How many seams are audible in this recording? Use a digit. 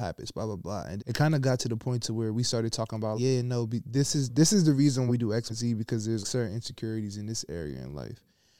5